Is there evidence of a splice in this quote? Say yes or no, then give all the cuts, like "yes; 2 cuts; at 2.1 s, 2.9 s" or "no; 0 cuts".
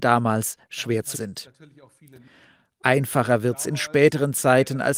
yes; 1 cut; at 1.1 s